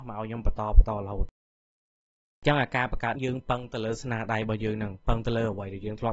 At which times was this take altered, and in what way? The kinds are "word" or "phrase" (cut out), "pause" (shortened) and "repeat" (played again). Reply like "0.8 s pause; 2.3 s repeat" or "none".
3.1 s word